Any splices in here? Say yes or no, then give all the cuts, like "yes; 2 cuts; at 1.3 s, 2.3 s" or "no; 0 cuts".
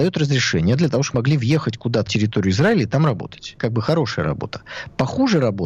yes; 3 cuts; at 1.1 s, 2.1 s, 3.6 s